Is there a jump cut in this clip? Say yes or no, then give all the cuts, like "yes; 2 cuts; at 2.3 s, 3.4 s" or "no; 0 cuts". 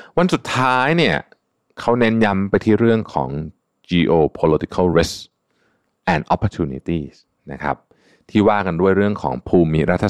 no; 0 cuts